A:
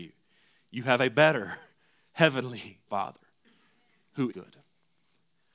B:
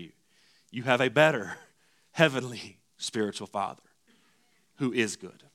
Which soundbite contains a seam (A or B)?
A